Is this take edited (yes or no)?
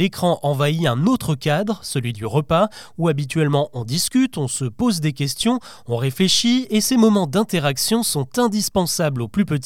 no